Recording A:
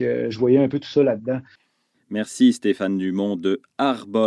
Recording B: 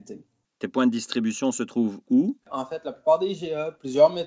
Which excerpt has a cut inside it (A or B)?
B